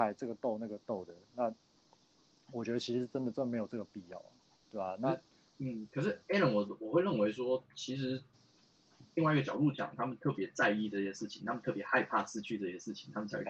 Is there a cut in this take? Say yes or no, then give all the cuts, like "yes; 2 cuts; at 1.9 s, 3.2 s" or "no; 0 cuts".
no; 0 cuts